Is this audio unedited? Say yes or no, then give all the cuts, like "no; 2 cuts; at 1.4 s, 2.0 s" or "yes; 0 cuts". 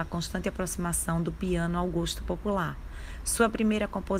yes; 0 cuts